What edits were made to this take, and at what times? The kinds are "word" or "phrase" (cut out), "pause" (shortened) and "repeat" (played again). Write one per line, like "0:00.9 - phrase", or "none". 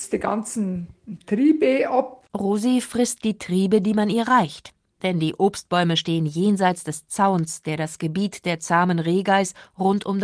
0:02.3 - pause